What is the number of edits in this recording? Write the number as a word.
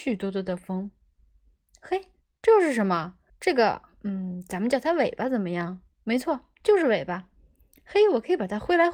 three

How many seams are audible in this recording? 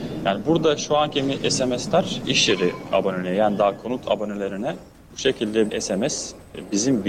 two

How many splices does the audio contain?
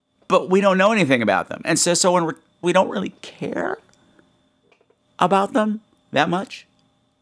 one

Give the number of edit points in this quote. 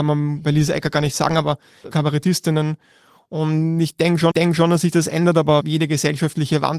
two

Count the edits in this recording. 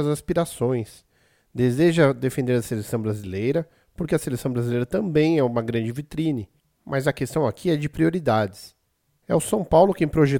zero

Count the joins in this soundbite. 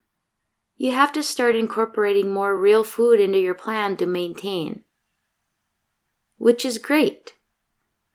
zero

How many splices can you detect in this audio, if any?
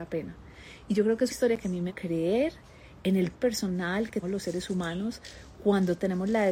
four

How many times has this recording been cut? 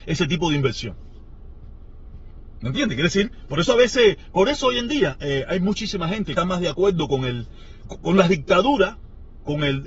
two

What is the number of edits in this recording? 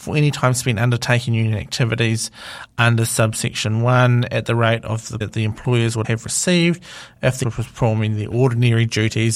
three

